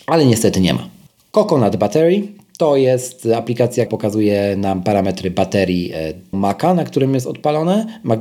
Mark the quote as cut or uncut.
cut